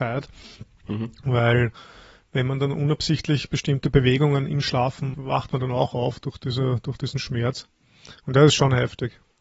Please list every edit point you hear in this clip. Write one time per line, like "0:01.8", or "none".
0:05.1